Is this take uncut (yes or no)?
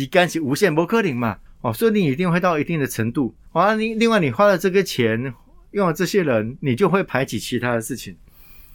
no